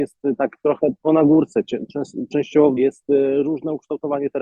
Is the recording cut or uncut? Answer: cut